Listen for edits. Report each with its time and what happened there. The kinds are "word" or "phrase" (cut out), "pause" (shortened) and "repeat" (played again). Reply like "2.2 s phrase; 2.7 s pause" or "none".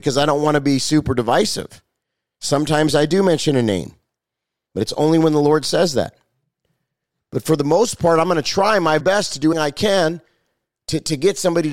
9.0 s word; 9.5 s word

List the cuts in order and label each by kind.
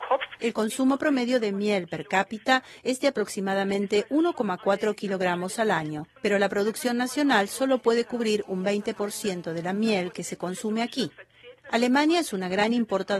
6.2 s pause

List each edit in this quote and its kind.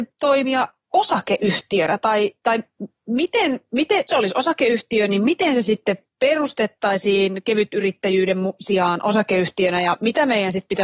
4.1 s phrase

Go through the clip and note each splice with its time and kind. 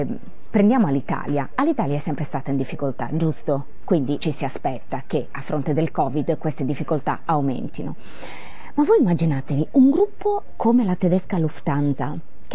4.2 s word

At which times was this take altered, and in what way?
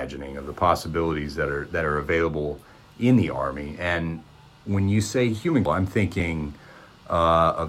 5.7 s word

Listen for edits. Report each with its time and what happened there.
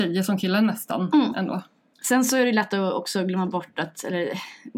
none

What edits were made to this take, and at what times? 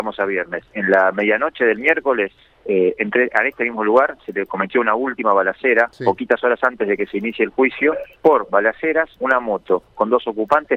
2.4 s pause; 8.1 s pause; 9.1 s word

